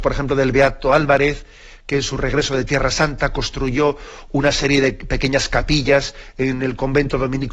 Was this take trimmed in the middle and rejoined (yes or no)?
no